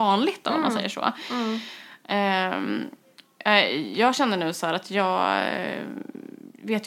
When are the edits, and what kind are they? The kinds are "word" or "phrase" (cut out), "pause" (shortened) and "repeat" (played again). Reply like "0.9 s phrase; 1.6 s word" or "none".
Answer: none